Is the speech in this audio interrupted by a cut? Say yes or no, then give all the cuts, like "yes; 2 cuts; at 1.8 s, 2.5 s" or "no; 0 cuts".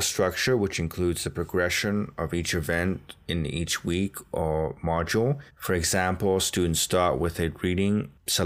yes; 1 cut; at 5.5 s